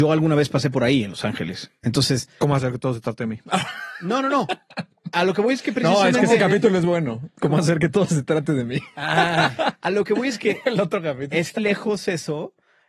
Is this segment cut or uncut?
cut